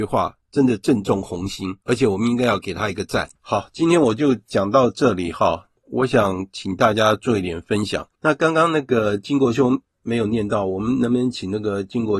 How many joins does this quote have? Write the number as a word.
four